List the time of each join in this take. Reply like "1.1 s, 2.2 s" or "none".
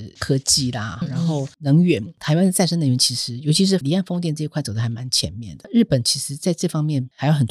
1.0 s